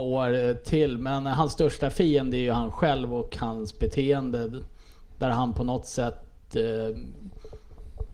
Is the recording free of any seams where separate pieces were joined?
yes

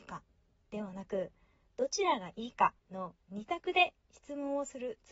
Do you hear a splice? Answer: yes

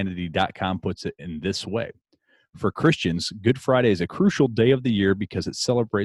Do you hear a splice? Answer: no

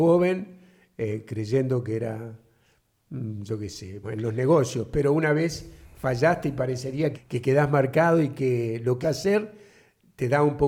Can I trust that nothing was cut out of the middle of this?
no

